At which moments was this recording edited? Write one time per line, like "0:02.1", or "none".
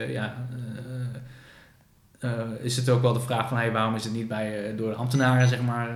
none